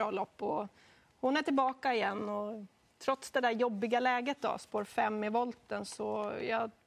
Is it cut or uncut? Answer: uncut